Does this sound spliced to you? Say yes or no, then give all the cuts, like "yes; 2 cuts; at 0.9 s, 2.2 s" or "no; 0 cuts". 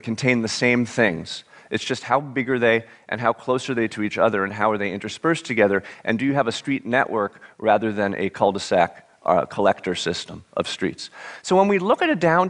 no; 0 cuts